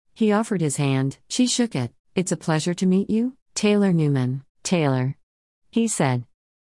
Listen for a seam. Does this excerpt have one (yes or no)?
yes